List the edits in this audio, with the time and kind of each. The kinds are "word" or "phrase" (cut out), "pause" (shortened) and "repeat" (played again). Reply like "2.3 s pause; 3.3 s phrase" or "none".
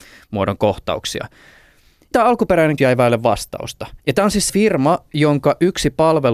2.1 s word; 2.8 s word; 4.0 s pause; 4.5 s word